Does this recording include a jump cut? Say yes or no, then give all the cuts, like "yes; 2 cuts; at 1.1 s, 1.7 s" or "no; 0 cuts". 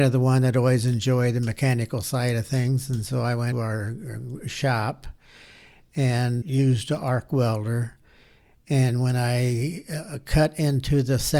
yes; 2 cuts; at 3.5 s, 6.4 s